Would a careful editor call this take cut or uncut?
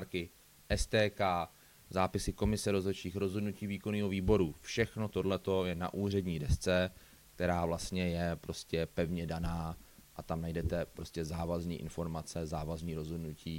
uncut